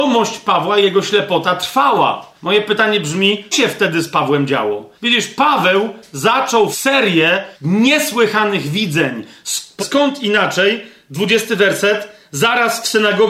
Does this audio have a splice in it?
yes; 6 cuts; at 2.3 s, 3.5 s, 5.0 s, 6.7 s, 7.5 s, 9.8 s

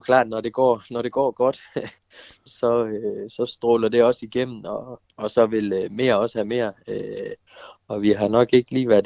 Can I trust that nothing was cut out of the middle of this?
no; 2 cuts; at 2.5 s, 5.1 s

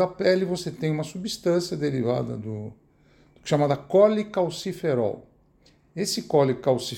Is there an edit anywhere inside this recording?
no; 0 cuts

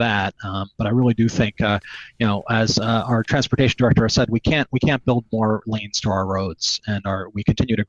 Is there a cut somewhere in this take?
no; 0 cuts

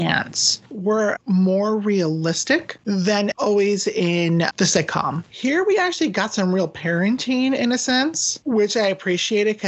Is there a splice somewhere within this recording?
no; 0 cuts

